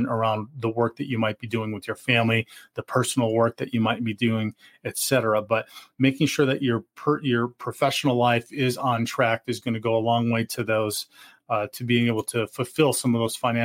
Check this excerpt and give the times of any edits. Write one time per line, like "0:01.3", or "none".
none